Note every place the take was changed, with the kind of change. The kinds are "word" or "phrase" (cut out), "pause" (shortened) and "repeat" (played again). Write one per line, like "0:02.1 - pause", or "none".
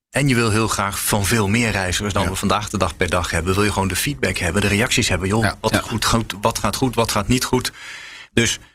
none